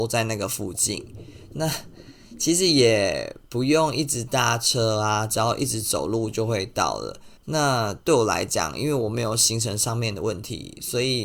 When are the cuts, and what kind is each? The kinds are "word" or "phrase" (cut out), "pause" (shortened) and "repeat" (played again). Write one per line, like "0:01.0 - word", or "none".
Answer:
0:07.4 - pause